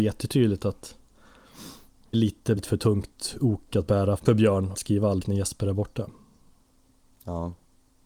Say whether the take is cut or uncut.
cut